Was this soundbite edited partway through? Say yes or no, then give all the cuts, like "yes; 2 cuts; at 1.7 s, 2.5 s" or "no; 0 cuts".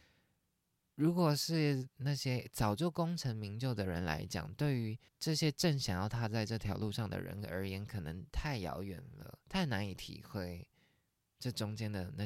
yes; 2 cuts; at 5.1 s, 9.4 s